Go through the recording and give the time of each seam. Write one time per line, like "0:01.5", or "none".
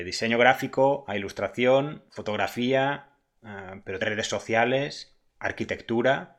0:02.1
0:04.0